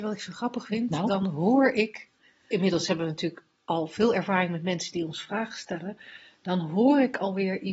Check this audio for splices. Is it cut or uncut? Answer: uncut